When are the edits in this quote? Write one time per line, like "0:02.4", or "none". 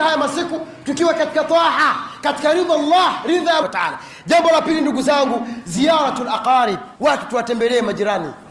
0:03.6
0:07.0